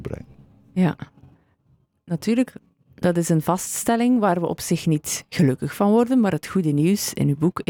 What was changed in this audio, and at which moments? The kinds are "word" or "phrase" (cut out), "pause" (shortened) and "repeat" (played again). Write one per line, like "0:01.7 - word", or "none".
none